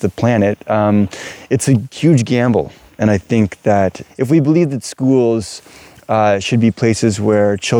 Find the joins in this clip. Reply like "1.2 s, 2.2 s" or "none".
none